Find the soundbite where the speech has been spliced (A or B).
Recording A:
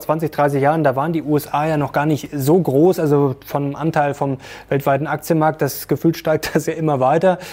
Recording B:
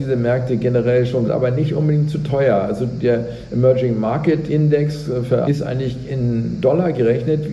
B